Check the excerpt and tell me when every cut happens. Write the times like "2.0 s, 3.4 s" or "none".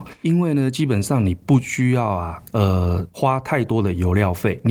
none

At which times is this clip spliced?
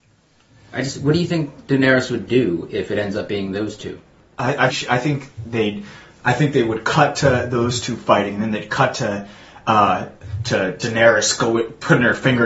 4.7 s

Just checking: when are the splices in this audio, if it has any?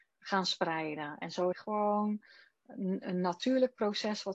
1.5 s

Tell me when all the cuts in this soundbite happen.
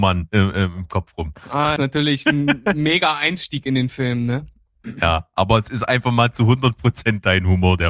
1.8 s

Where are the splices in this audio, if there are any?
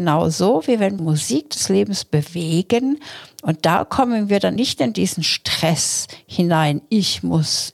1.0 s, 4.6 s

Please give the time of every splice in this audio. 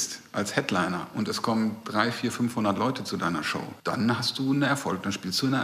3.8 s

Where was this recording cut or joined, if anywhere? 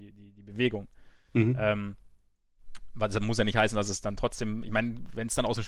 none

